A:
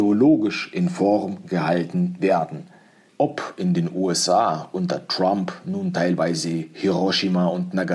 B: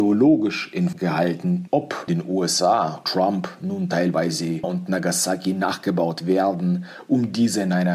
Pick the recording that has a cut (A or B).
B